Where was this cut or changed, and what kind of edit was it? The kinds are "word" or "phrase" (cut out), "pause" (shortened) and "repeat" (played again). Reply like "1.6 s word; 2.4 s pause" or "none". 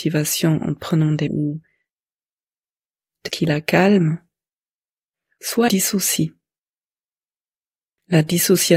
1.3 s word; 3.3 s word; 5.7 s word